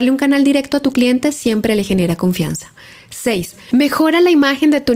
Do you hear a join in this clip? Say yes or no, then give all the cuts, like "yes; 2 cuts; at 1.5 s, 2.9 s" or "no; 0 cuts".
no; 0 cuts